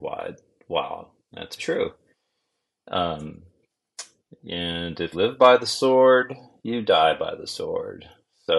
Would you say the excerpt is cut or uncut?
cut